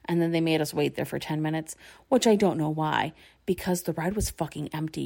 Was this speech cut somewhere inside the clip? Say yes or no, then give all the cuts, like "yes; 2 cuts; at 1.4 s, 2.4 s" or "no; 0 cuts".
no; 0 cuts